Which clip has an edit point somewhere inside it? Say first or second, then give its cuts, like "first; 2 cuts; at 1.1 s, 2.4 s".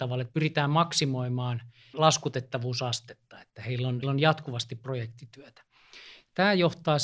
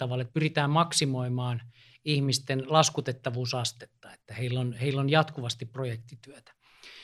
first; 2 cuts; at 1.9 s, 4.0 s